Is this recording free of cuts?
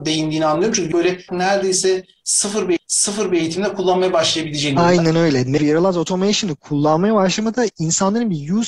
no; 4 cuts; at 0.9 s, 1.3 s, 2.8 s, 5.6 s

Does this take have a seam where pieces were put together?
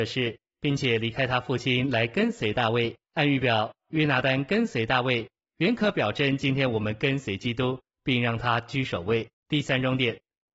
yes; 2 cuts; at 3.0 s, 9.3 s

